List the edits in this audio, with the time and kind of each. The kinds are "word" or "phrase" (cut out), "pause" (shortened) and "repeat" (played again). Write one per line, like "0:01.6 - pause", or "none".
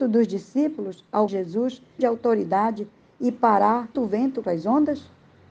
0:01.3 - word
0:02.0 - word
0:03.9 - word
0:04.4 - word